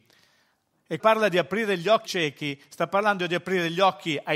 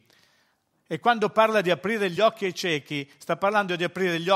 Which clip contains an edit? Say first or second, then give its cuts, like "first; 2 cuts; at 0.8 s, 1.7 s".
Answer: first; 2 cuts; at 1.0 s, 2.0 s